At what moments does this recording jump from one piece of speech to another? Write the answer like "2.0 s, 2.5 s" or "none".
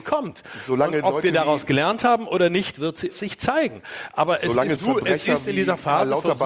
3.1 s, 4.8 s